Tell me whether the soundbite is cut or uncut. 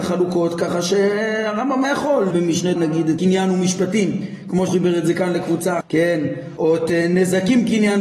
cut